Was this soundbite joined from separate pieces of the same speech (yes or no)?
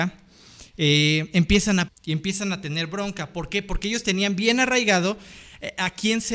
yes